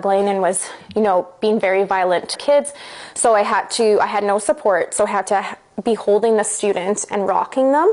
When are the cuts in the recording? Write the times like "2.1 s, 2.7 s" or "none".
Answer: 2.3 s

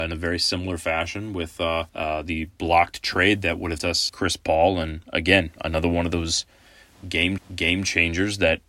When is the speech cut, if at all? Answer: 1.9 s, 3.8 s, 4.1 s, 7.4 s

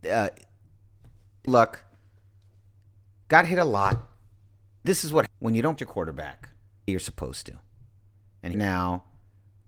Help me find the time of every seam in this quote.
1.5 s, 4.8 s, 5.3 s, 5.8 s, 6.9 s, 8.5 s

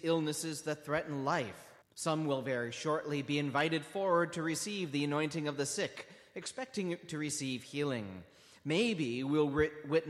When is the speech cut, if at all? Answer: 1.8 s

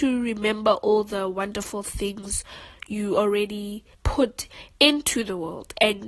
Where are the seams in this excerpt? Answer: 3.9 s

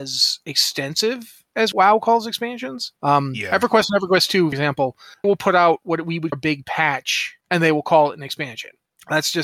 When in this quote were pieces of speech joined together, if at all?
1.7 s, 3.0 s, 4.5 s, 5.2 s, 6.3 s, 7.4 s

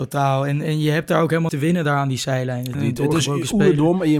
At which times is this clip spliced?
1.5 s, 2.7 s

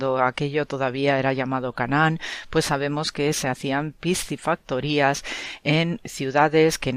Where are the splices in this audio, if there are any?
none

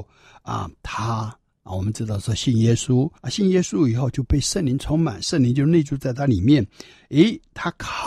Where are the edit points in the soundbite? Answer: 3.2 s

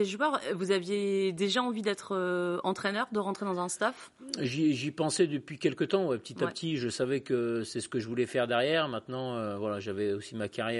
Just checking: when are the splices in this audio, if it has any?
none

